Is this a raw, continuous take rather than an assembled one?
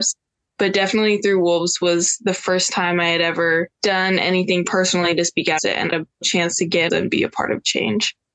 no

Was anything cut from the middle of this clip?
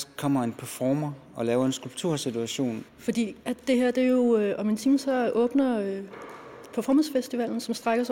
yes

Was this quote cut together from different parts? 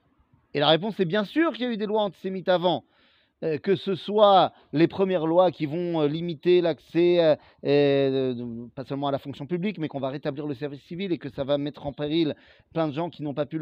no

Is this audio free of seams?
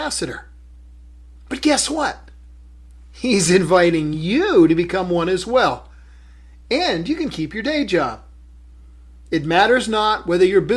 yes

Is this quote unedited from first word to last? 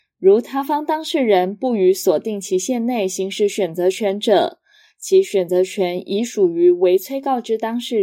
yes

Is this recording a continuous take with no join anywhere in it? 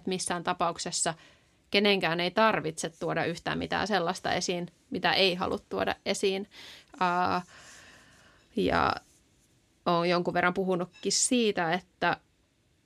yes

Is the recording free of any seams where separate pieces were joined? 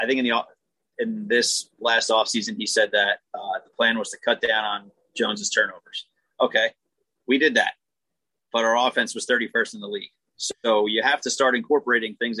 yes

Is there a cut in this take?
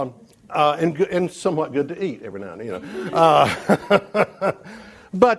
no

